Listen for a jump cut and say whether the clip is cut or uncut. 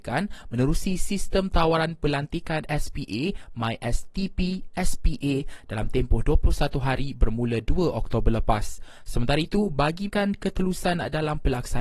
cut